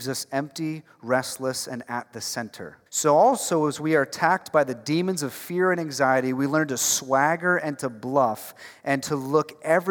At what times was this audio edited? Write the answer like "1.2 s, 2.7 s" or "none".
2.9 s